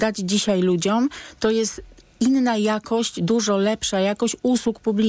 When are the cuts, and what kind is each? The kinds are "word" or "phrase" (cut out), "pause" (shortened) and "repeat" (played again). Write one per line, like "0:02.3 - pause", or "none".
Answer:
none

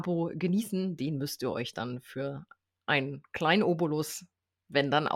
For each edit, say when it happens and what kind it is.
none

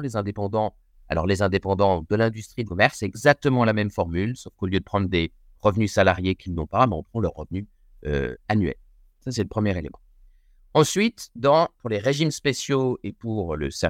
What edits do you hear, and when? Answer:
0:02.6 - phrase

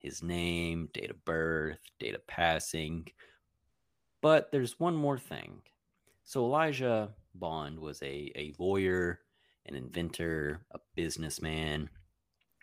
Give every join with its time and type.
none

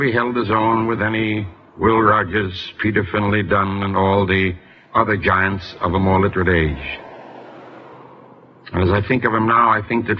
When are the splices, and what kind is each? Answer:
none

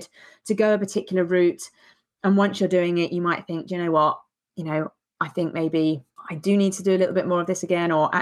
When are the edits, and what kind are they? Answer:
none

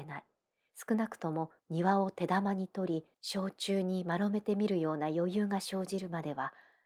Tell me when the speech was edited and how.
0:01.6 - pause
0:03.1 - pause

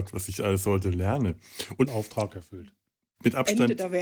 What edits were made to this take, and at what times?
0:01.9 - word

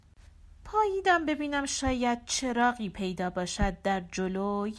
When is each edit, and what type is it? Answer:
none

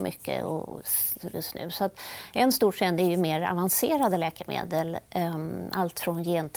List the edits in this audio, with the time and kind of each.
0:01.3 - phrase

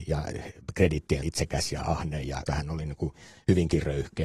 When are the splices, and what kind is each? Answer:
0:01.2 - word
0:02.5 - word

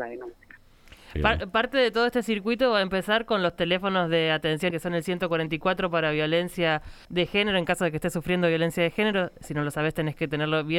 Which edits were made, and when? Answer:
0:04.7 - word
0:07.0 - pause

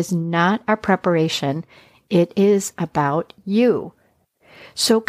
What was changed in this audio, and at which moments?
none

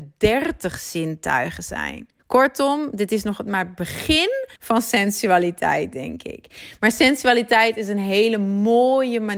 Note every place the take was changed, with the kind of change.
0:02.2 - pause
0:04.6 - pause

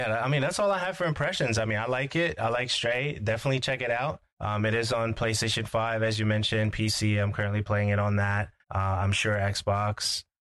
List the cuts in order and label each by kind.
0:04.3 - pause
0:08.6 - pause

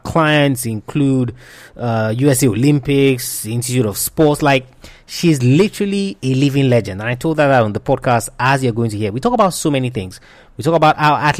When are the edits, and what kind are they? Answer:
none

